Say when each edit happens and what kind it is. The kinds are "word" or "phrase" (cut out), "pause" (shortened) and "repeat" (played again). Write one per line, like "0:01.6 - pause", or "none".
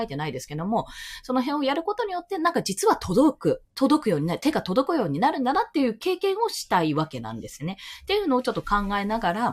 0:03.7 - pause